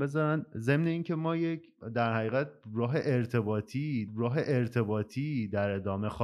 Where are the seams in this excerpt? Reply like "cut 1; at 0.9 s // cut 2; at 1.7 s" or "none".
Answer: cut 1; at 4.1 s